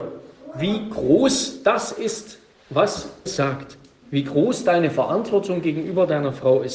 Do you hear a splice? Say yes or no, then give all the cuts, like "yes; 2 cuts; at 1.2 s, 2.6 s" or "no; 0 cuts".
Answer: yes; 1 cut; at 3.3 s